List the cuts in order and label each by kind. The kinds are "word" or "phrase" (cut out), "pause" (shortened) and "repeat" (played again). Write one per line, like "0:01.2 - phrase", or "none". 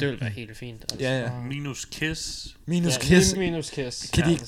0:03.4 - word